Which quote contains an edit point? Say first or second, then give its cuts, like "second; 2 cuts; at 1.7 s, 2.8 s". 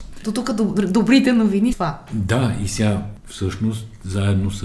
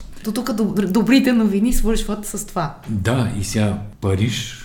first; 2 cuts; at 1.7 s, 3.2 s